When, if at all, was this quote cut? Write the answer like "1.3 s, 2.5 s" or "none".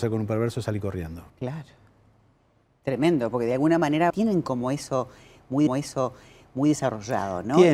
1.3 s, 4.1 s, 5.7 s